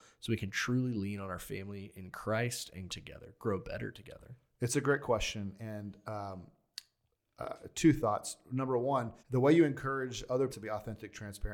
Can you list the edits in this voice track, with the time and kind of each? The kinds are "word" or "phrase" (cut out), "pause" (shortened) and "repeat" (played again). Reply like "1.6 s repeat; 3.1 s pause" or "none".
2.9 s word; 9.2 s pause; 10.5 s word